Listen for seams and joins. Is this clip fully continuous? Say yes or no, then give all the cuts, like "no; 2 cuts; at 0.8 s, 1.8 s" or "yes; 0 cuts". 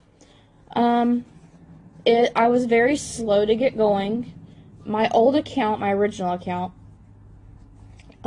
yes; 0 cuts